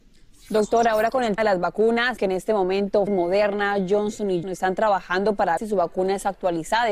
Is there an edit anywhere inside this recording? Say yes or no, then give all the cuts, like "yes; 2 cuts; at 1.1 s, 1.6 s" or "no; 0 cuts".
yes; 5 cuts; at 1.4 s, 2.2 s, 3.1 s, 4.4 s, 5.6 s